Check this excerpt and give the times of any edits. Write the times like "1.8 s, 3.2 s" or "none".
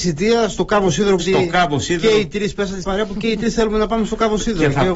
1.2 s, 2.8 s